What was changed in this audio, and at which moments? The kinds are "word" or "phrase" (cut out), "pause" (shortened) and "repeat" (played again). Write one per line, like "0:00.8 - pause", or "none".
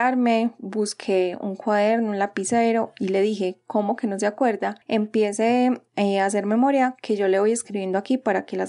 0:05.9 - pause